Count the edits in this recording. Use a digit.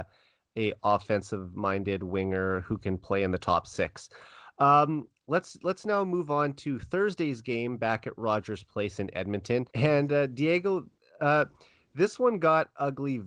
1